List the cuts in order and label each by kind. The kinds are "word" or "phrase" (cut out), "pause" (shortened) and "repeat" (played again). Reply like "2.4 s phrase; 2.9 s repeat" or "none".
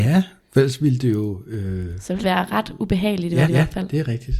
2.2 s word; 3.5 s repeat